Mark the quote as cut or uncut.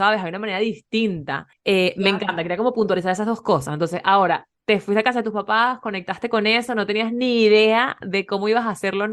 cut